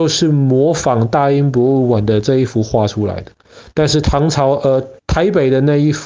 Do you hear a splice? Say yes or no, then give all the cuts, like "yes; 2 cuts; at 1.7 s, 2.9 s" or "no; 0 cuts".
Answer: yes; 1 cut; at 5.0 s